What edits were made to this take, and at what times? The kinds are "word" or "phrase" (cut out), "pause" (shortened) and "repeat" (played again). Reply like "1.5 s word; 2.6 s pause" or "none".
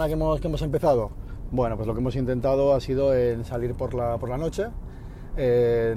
none